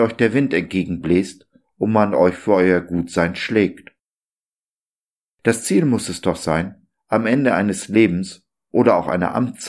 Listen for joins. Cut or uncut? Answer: uncut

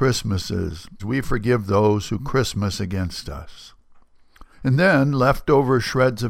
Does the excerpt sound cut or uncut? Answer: cut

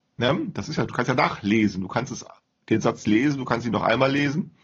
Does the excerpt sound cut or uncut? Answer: uncut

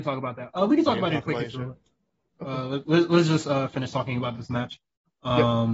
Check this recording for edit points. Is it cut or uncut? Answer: uncut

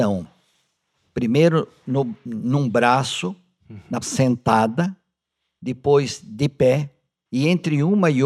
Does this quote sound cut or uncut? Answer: cut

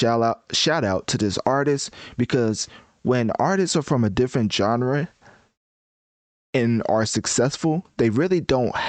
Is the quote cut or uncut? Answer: uncut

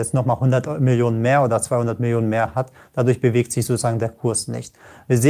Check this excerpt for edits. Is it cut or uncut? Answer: uncut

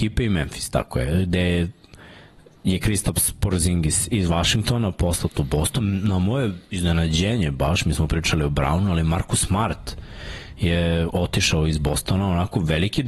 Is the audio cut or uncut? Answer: uncut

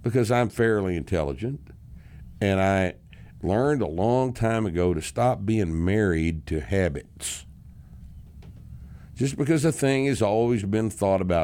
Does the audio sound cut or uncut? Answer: uncut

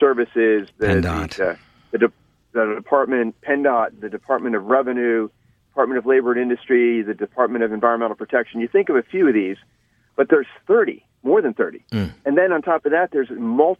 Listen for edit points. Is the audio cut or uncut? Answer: uncut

